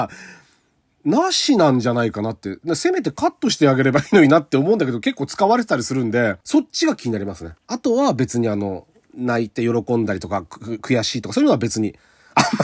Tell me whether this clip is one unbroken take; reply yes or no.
no